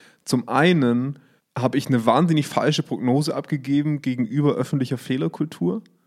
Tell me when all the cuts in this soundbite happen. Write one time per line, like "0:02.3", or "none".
0:01.4